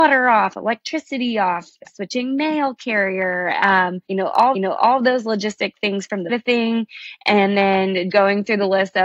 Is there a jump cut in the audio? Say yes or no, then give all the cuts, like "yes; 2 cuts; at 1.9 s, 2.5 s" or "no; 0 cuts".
yes; 5 cuts; at 1.9 s, 4.1 s, 4.5 s, 6.3 s, 8.1 s